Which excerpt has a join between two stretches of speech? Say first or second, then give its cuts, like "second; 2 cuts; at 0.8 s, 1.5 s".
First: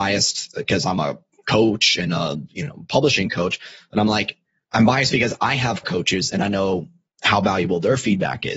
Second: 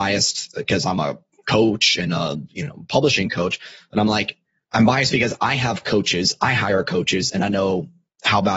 first; 1 cut; at 5.8 s